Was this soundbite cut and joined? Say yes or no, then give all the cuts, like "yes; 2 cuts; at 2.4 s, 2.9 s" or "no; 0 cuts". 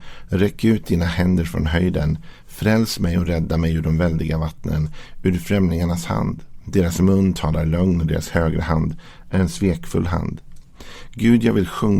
no; 0 cuts